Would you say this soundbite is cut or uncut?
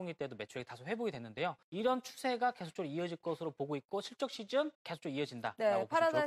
cut